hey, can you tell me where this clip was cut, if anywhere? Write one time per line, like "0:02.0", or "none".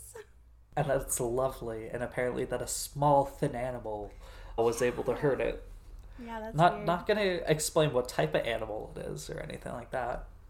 0:04.6